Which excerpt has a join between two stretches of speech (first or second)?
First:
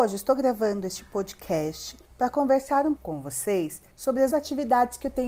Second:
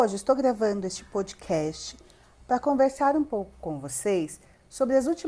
first